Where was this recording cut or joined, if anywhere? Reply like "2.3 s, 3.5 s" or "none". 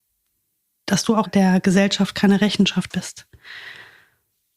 1.2 s, 2.9 s